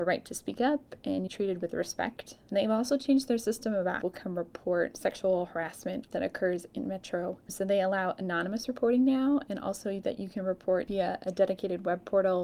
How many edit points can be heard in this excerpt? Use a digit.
2